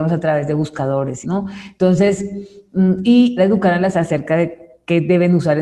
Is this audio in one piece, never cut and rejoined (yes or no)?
no